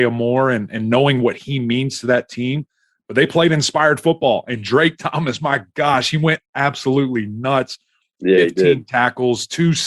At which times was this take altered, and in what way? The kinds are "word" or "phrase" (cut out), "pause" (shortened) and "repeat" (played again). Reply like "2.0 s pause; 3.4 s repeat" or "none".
none